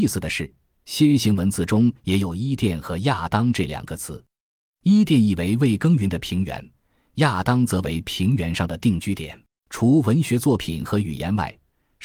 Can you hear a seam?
yes; 1 cut; at 9.5 s

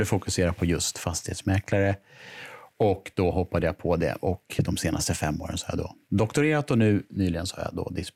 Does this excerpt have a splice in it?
no; 0 cuts

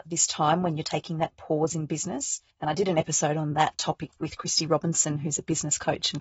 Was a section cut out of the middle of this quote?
yes; 1 cut; at 2.5 s

